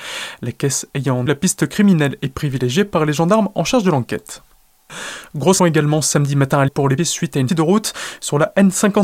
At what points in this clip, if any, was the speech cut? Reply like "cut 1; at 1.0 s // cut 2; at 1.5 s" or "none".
cut 1; at 1.3 s // cut 2; at 5.6 s // cut 3; at 6.7 s // cut 4; at 7.0 s // cut 5; at 7.5 s